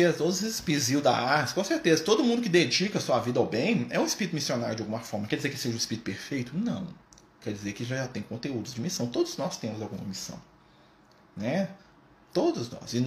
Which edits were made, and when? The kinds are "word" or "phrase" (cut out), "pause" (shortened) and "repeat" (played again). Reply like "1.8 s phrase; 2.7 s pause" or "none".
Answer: none

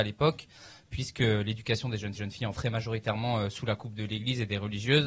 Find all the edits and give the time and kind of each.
2.2 s repeat; 2.5 s phrase

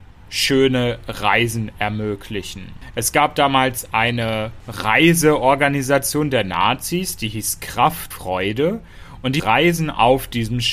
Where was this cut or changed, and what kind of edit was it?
8.1 s word; 9.4 s word

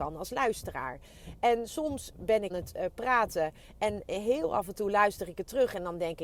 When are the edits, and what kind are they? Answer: 2.1 s word; 2.5 s word

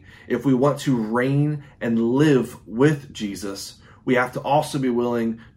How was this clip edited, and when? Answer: none

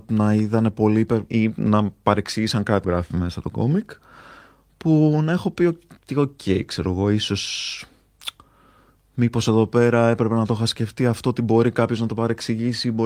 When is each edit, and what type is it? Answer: 1.3 s word; 2.8 s phrase

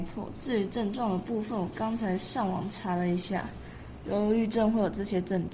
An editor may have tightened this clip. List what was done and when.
none

